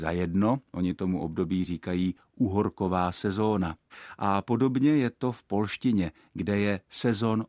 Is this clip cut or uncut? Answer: uncut